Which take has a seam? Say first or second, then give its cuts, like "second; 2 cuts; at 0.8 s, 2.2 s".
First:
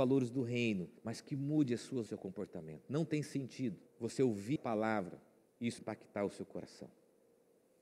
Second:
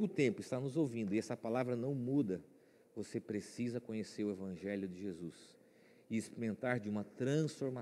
first; 6 cuts; at 1.0 s, 2.1 s, 3.9 s, 4.6 s, 5.5 s, 5.8 s